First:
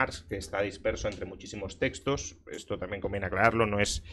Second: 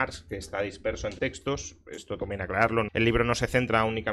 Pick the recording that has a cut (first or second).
second